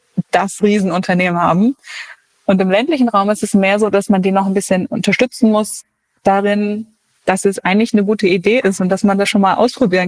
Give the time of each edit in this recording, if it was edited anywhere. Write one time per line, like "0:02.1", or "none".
none